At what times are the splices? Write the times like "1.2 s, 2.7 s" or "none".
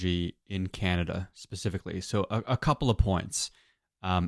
none